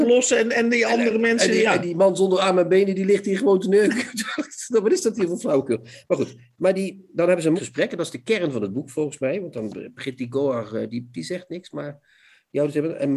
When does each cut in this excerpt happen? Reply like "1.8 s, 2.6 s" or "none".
7.6 s